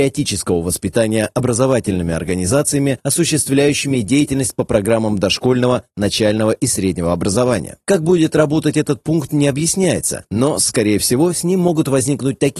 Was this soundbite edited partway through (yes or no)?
no